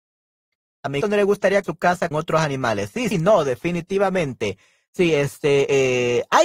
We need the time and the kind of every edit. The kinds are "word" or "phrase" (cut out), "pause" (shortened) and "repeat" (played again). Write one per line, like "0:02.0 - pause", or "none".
0:01.0 - word
0:01.6 - word
0:02.1 - word
0:03.1 - word

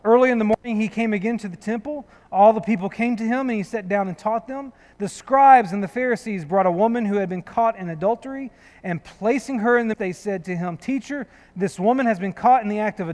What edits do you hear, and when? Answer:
0:09.9 - word

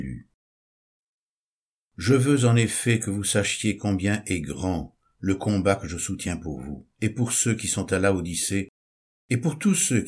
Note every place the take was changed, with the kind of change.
0:06.9 - pause

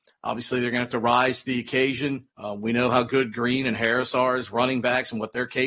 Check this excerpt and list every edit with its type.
0:02.3 - pause

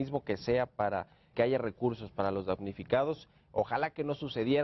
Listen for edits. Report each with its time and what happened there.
0:01.3 - word

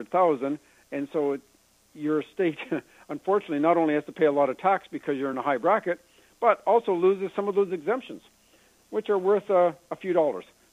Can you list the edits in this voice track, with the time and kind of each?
none

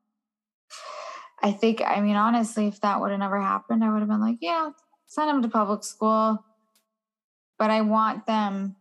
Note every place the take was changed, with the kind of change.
none

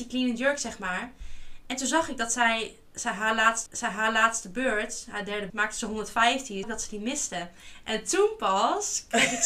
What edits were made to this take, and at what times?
0:03.7 - repeat
0:05.5 - word
0:06.6 - word

